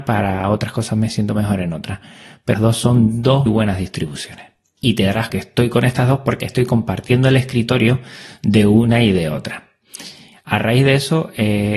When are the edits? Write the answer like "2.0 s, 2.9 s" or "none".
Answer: 2.5 s, 3.5 s, 5.3 s, 6.4 s